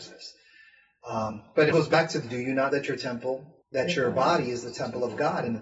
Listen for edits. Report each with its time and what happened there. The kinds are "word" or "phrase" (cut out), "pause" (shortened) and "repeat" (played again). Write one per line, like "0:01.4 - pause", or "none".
0:01.7 - word
0:02.7 - word
0:03.6 - pause